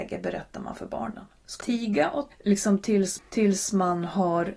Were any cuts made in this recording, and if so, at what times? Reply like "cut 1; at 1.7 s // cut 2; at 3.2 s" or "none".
cut 1; at 1.6 s // cut 2; at 2.3 s // cut 3; at 3.2 s